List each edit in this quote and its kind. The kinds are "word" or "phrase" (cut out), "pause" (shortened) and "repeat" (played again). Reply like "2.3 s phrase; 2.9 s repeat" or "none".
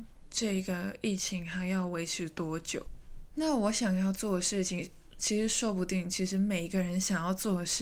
5.2 s word